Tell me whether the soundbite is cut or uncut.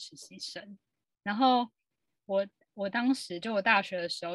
uncut